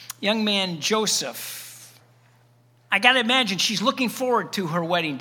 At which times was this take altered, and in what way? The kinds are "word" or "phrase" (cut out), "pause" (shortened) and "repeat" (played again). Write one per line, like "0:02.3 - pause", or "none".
none

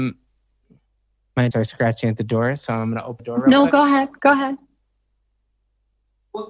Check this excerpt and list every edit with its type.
0:01.5 - phrase
0:03.2 - word

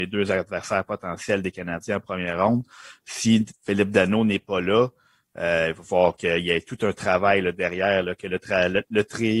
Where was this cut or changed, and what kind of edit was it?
none

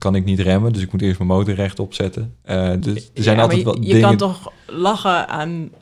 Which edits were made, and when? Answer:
0:02.8 - word

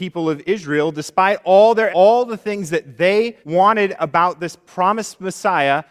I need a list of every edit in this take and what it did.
0:01.9 - phrase
0:03.4 - pause

